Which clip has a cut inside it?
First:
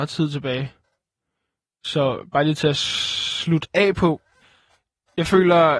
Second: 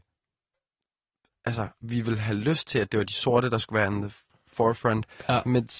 second; 1 cut; at 1.8 s

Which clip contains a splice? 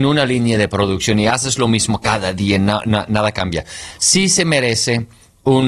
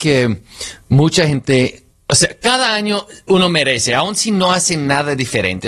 second; 1 cut; at 1.9 s

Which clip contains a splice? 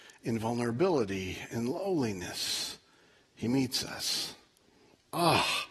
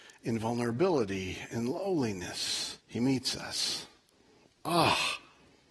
second; 1 cut; at 2.8 s

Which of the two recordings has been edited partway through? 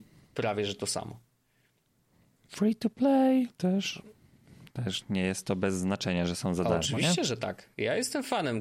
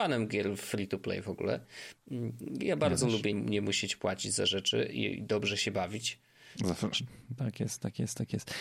second; 1 cut; at 3.3 s

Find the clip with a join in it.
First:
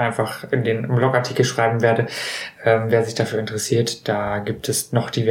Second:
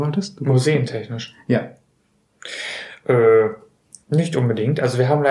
second; 1 cut; at 4.0 s

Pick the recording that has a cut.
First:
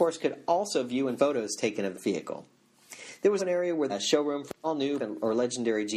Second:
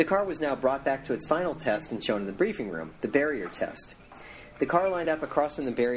first; 6 cuts; at 1.2 s, 1.9 s, 3.4 s, 3.9 s, 4.6 s, 5.0 s

